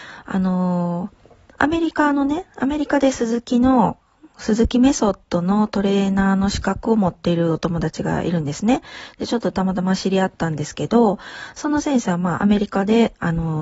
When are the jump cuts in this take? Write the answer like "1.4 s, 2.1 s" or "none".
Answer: 1.5 s